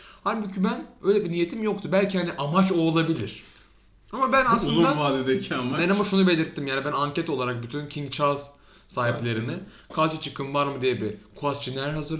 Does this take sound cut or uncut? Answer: uncut